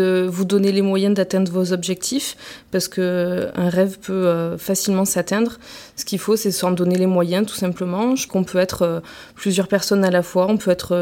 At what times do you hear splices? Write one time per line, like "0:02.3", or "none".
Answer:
0:08.3